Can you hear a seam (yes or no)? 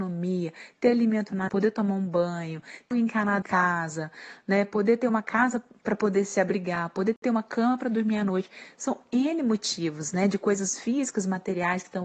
yes